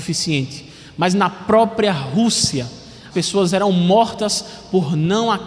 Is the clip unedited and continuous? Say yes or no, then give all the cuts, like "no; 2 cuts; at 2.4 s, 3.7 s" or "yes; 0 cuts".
no; 1 cut; at 3.1 s